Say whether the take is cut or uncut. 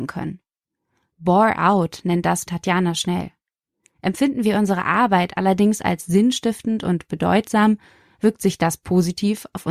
cut